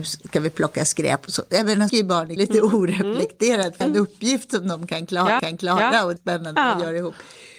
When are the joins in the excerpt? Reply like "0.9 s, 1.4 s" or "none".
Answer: 1.9 s, 2.4 s, 3.8 s, 5.4 s, 6.2 s